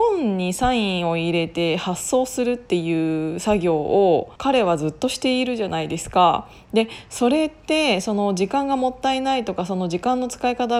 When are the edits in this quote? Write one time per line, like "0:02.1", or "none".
0:04.4